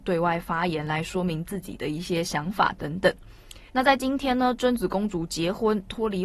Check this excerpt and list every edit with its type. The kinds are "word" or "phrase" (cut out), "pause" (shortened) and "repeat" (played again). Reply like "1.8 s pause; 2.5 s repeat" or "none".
3.7 s pause